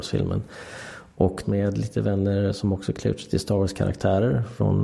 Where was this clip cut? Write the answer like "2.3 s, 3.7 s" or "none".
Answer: 1.4 s